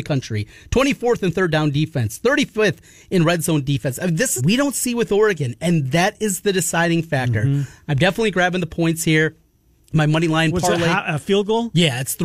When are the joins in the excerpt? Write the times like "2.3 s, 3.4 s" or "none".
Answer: 4.4 s